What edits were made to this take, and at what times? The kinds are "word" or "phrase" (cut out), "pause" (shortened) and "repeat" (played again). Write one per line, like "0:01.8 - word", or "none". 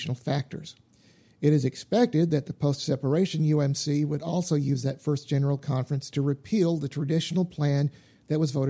none